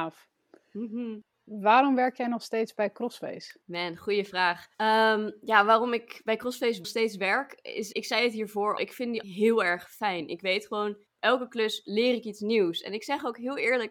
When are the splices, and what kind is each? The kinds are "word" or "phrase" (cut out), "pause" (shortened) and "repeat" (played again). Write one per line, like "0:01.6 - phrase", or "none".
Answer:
0:01.3 - pause
0:03.6 - pause
0:04.7 - pause
0:06.8 - word
0:07.9 - word
0:08.8 - word
0:09.2 - word
0:11.1 - pause